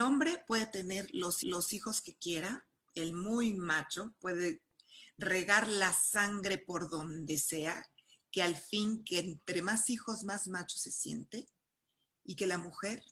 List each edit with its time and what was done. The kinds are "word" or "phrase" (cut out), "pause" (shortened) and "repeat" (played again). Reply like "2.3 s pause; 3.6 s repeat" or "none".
1.4 s repeat